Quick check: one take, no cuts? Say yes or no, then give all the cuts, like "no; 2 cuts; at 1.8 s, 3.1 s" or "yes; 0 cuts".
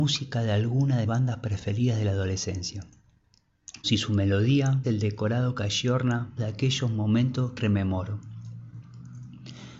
no; 5 cuts; at 1.1 s, 3.8 s, 4.8 s, 6.4 s, 7.6 s